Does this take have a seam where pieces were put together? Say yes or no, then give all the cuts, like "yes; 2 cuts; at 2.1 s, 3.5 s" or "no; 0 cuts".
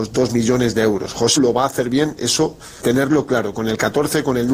yes; 2 cuts; at 1.4 s, 2.8 s